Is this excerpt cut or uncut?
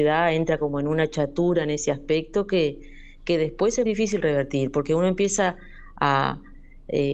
cut